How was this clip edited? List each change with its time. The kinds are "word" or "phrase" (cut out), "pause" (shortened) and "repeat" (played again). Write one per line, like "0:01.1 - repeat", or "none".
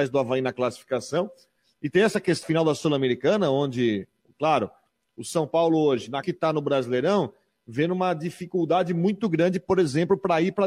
0:02.4 - word
0:06.2 - word